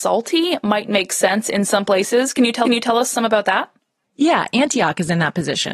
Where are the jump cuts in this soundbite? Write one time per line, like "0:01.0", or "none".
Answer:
0:02.7
0:04.0